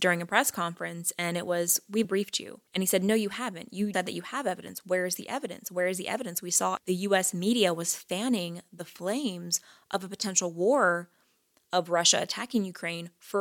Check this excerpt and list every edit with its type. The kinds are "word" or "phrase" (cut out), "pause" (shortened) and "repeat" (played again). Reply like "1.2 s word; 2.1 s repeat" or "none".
2.0 s word; 2.7 s pause; 3.9 s word; 6.8 s word

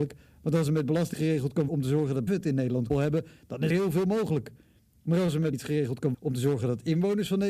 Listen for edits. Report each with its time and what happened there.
1.1 s word; 1.7 s word; 2.3 s word; 2.9 s word; 3.7 s word; 5.5 s word; 6.1 s word

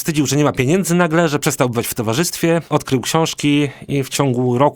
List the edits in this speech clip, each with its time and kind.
none

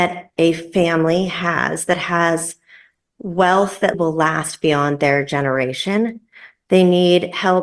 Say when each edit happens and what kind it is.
3.9 s word

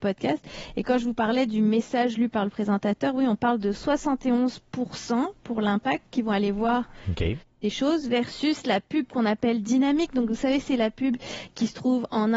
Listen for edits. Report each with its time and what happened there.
none

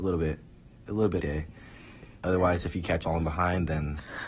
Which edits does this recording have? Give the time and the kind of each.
1.2 s word; 3.0 s word

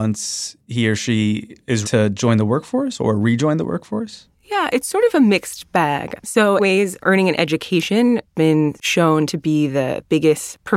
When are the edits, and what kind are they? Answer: 1.8 s word; 4.3 s pause; 6.6 s phrase; 8.3 s word

